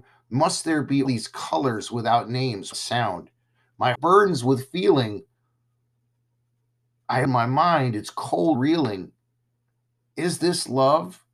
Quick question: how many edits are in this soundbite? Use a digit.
5